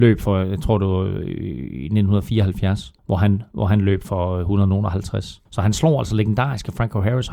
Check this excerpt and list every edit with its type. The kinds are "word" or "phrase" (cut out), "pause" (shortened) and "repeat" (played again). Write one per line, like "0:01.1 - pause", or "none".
0:03.0 - pause
0:05.5 - pause